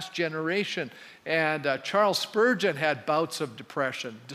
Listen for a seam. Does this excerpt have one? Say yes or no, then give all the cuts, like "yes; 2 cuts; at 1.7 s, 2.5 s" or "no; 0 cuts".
no; 0 cuts